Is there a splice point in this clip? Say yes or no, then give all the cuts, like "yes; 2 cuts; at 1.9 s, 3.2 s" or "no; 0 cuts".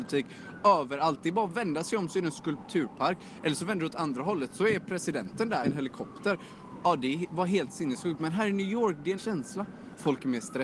yes; 2 cuts; at 5.6 s, 9.2 s